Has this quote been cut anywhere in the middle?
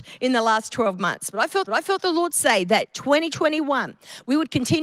yes; 1 cut; at 1.7 s

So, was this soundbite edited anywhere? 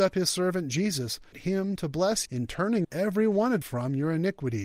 yes; 4 cuts; at 1.3 s, 2.3 s, 2.8 s, 3.6 s

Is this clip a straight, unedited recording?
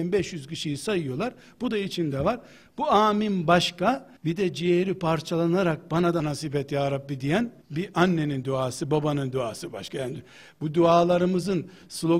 no; 3 cuts; at 4.2 s, 6.2 s, 7.6 s

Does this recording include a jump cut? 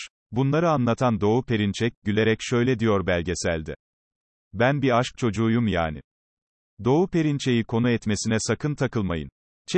no; 0 cuts

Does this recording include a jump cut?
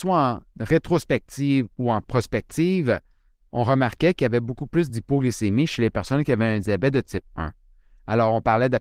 no; 0 cuts

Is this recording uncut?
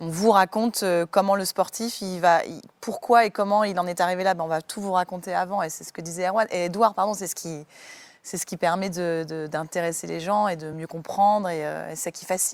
yes; 0 cuts

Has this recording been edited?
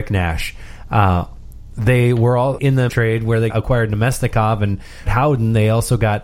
yes; 4 cuts; at 2.6 s, 2.9 s, 3.5 s, 5.1 s

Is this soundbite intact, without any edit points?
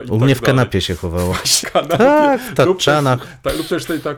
no; 1 cut; at 1.6 s

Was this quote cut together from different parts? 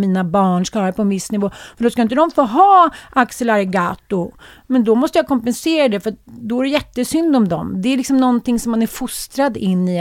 no; 0 cuts

